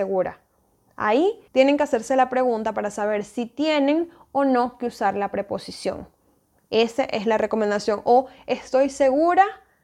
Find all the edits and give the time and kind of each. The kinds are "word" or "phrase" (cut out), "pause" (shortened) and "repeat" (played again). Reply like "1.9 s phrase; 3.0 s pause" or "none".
1.5 s pause